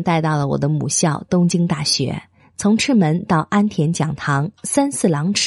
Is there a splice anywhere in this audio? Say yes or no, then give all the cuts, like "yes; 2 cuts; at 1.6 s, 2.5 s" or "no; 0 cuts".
no; 0 cuts